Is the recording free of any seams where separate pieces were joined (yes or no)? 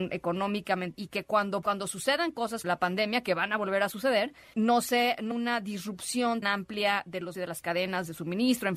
no